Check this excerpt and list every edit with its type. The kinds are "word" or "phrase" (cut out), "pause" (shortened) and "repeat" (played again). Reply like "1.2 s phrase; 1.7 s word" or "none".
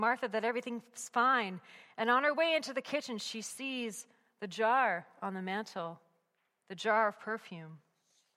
none